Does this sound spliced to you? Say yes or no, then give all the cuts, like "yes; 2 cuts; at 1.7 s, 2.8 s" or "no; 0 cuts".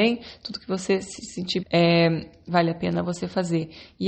yes; 2 cuts; at 1.6 s, 2.5 s